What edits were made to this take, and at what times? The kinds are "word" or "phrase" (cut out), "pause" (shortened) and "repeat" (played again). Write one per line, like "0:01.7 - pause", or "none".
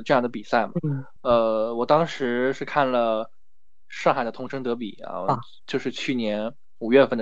none